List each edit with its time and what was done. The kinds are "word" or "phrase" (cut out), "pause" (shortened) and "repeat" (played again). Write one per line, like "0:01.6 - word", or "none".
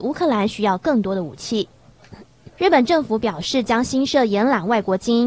0:02.5 - pause